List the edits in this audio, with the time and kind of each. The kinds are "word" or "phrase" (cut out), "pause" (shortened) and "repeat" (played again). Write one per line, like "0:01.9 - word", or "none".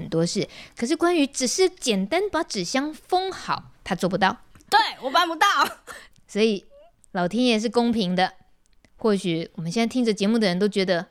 0:03.7 - pause